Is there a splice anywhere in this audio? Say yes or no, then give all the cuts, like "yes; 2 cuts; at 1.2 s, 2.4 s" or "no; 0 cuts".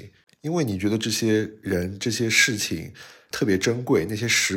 yes; 1 cut; at 3.3 s